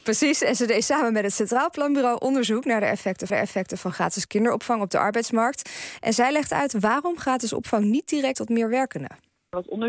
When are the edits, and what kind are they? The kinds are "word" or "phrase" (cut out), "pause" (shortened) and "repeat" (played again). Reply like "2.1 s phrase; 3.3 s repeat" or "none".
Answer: 3.3 s repeat; 8.3 s word